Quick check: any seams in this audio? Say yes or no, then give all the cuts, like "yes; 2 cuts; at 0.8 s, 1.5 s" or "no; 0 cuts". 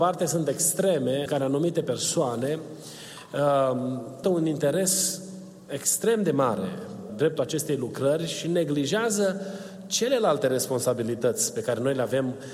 yes; 3 cuts; at 1.3 s, 4.2 s, 7.1 s